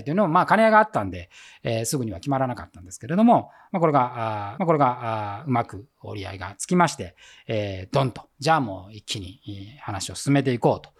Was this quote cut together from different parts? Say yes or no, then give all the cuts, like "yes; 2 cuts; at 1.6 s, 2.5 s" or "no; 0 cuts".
yes; 1 cut; at 4.6 s